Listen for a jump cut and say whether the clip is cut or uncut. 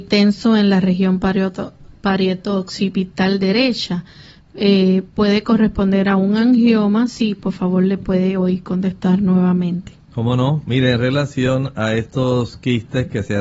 cut